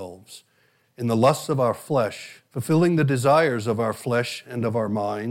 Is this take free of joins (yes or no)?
no